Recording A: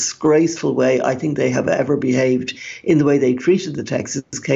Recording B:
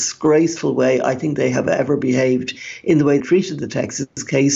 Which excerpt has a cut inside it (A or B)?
B